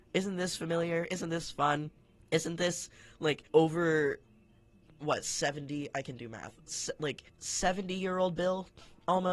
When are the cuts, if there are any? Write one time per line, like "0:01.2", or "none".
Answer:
0:02.0
0:03.5
0:07.3